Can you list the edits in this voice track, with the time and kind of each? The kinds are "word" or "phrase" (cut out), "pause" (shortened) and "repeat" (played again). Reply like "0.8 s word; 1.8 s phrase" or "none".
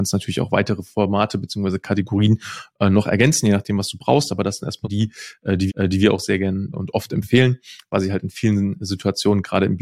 4.8 s word; 5.7 s repeat; 6.7 s word